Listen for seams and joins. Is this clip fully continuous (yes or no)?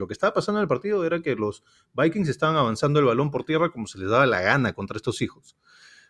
yes